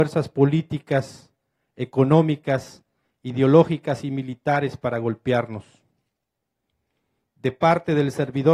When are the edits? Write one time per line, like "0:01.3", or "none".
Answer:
none